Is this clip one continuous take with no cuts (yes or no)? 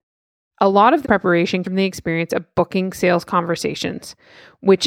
no